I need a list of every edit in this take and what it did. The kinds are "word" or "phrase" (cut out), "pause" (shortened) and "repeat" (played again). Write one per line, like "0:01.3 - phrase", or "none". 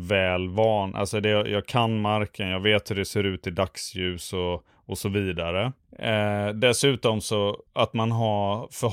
0:07.7 - pause